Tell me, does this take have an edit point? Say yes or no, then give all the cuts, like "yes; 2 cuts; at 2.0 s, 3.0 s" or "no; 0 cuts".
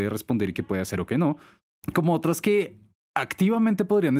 no; 0 cuts